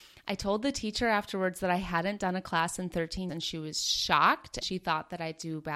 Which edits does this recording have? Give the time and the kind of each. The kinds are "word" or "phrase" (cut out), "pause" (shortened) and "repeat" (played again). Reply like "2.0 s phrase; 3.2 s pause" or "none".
3.3 s word; 4.6 s word